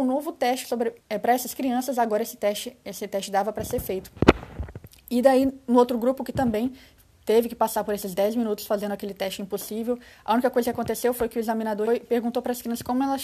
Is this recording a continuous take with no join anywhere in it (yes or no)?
no